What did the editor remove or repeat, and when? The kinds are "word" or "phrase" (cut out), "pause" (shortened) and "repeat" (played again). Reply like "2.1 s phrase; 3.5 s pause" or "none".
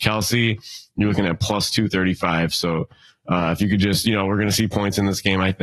none